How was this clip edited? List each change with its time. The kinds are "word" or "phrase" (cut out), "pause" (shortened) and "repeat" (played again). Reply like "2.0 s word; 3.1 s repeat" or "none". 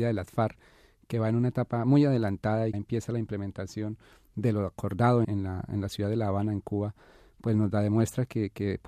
2.7 s phrase; 5.2 s word